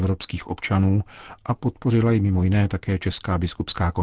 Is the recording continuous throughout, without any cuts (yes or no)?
yes